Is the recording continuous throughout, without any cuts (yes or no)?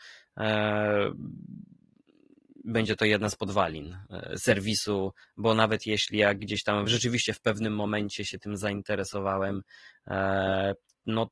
yes